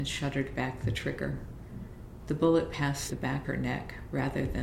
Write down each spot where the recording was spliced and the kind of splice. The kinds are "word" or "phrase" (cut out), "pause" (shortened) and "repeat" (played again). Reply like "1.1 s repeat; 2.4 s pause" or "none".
3.1 s word; 3.4 s word